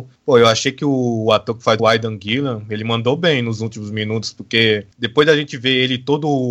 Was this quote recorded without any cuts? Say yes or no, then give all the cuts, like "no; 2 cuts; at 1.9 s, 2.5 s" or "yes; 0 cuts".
no; 1 cut; at 1.8 s